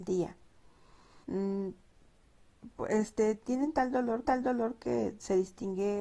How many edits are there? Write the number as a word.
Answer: two